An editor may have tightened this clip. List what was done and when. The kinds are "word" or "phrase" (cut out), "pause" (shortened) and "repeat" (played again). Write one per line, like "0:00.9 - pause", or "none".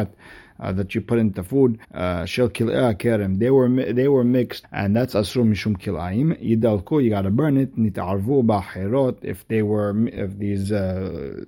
0:01.8 - pause
0:04.6 - phrase

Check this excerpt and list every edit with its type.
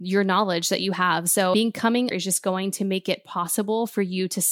0:02.1 - phrase

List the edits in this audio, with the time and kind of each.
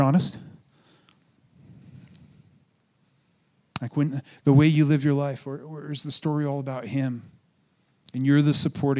none

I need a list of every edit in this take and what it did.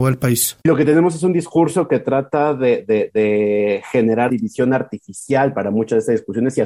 0:04.3 - word

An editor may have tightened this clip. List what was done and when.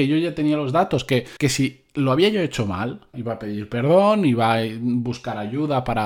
0:01.4 - pause
0:03.1 - word

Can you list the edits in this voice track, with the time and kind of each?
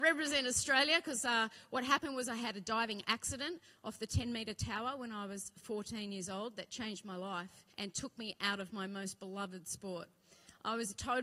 0:07.7 - pause

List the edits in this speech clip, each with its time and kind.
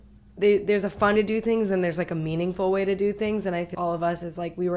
0:01.2 - word
0:03.7 - word

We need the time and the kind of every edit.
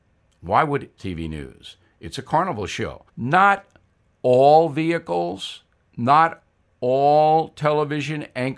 0:01.0 - phrase
0:03.1 - pause

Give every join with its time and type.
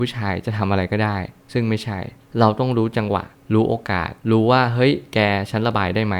0:04.2 - pause

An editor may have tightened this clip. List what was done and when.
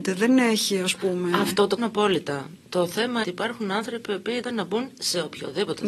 0:01.8 - word
0:03.2 - phrase
0:04.4 - word

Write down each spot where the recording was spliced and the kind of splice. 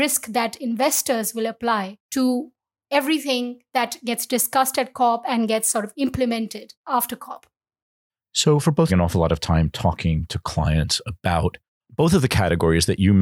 0:08.9 - phrase

